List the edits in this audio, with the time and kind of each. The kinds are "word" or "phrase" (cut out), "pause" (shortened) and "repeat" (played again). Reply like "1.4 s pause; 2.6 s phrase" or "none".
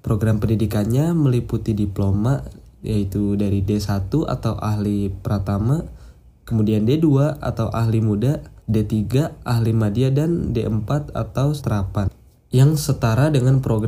8.6 s pause; 11.6 s word